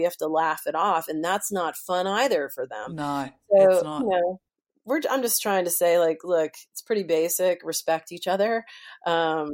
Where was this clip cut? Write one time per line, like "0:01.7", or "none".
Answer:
none